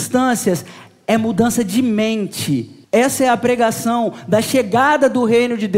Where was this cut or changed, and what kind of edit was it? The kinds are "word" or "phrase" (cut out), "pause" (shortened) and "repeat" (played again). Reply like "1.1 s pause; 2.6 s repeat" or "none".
2.8 s pause